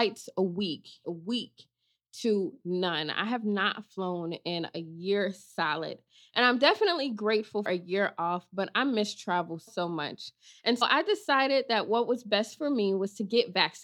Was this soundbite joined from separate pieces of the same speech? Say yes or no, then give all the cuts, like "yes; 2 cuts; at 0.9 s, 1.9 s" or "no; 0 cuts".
yes; 4 cuts; at 1.0 s, 7.7 s, 9.7 s, 10.8 s